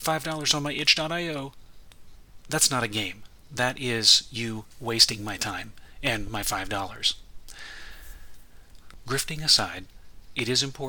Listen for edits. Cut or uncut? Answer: uncut